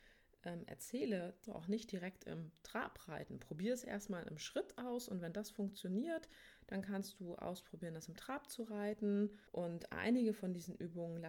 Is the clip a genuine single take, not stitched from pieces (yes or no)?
no